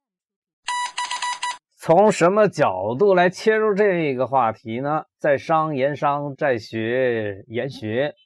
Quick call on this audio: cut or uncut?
cut